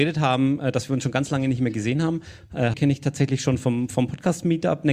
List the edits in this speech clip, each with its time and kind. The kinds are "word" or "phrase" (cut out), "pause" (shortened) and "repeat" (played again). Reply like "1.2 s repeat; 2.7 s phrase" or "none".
2.7 s word